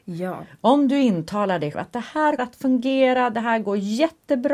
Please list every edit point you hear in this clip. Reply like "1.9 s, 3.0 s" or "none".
1.7 s, 2.4 s